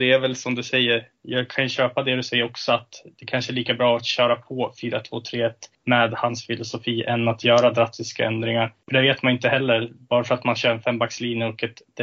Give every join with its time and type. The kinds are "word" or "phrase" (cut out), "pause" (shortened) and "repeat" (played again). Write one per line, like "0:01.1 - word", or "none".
0:05.7 - pause
0:08.8 - pause